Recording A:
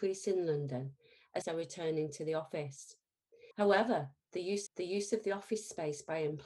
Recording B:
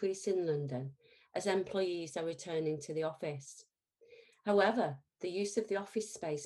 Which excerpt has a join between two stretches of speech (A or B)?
A